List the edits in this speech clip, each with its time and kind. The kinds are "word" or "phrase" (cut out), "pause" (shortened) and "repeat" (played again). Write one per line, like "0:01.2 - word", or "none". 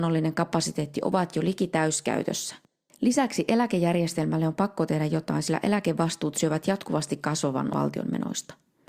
0:07.7 - word